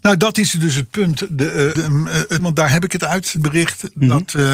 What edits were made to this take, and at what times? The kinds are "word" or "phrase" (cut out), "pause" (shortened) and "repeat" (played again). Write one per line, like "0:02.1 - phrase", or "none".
0:01.8 - word
0:02.4 - word
0:03.4 - word